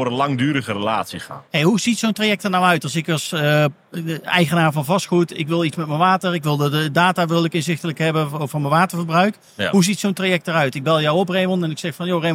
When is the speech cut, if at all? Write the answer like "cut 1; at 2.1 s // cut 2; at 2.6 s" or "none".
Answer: cut 1; at 1.5 s